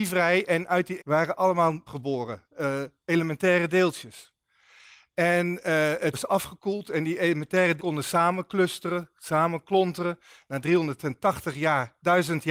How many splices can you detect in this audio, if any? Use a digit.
4